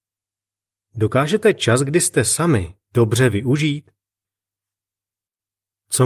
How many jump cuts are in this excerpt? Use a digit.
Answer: 0